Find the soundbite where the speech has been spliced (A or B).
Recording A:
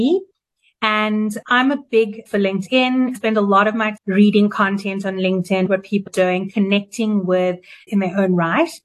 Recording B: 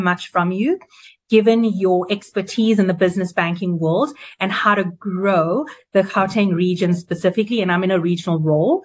A